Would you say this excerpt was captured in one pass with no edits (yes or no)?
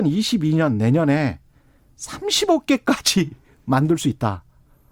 yes